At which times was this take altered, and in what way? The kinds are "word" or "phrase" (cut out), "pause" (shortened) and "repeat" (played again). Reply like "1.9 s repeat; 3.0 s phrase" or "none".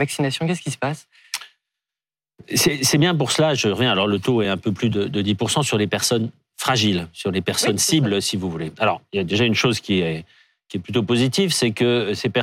none